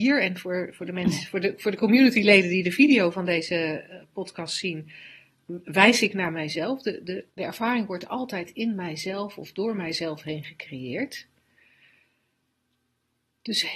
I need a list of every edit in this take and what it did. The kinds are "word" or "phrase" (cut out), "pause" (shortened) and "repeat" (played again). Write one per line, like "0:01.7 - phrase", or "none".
0:07.3 - pause

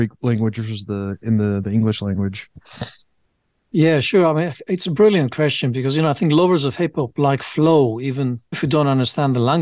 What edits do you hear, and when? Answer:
0:08.5 - word

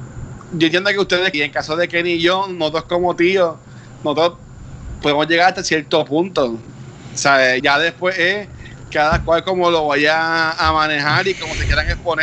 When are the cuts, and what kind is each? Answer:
0:01.3 - phrase
0:07.6 - word

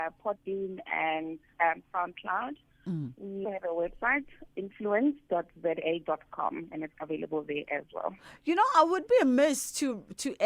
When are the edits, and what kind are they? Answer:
0:03.4 - word
0:04.5 - word
0:06.9 - word

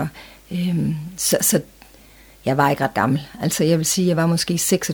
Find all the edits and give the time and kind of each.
none

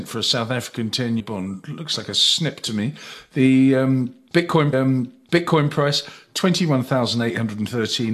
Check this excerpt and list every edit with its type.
0:01.2 - word
0:04.7 - repeat

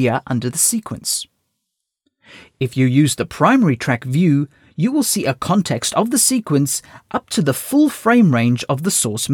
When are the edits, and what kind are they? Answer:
none

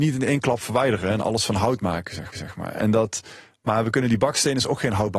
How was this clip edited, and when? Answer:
0:02.3 - repeat

